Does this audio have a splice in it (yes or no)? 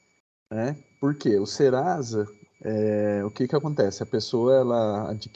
no